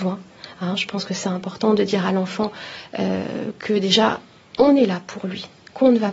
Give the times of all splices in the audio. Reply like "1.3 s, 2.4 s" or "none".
none